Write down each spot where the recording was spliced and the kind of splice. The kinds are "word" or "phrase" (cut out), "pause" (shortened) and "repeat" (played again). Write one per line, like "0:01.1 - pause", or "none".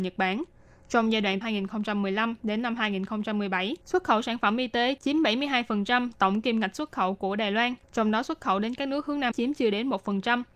0:01.4 - phrase
0:03.8 - pause
0:07.8 - pause
0:09.3 - word